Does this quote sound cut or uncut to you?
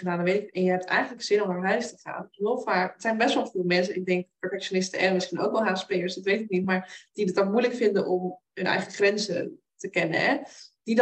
uncut